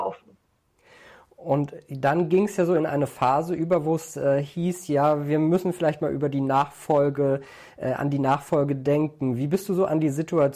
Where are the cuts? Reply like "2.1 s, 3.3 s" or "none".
none

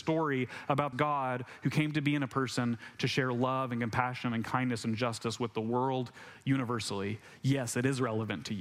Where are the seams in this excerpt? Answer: 0.9 s

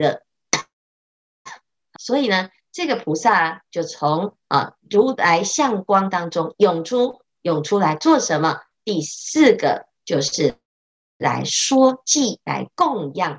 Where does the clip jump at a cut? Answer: 2.0 s

